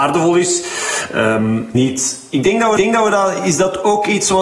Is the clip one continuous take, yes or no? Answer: no